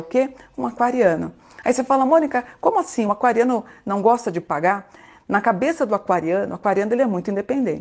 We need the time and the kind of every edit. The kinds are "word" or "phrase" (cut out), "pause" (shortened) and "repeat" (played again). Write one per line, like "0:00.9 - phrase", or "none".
none